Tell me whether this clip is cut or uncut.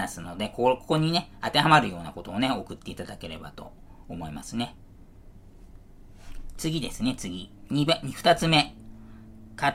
uncut